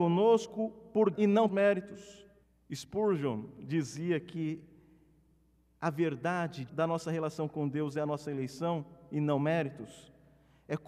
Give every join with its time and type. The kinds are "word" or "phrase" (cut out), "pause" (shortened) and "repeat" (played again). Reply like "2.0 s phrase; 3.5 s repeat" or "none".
1.1 s word; 1.5 s phrase; 2.4 s pause; 6.7 s phrase